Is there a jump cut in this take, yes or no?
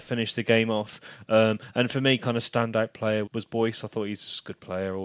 yes